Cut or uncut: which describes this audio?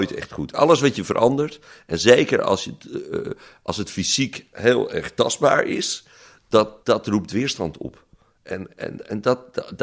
cut